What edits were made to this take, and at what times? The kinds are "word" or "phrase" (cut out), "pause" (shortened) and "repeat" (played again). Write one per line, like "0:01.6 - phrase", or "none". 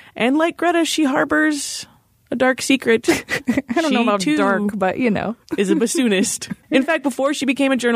none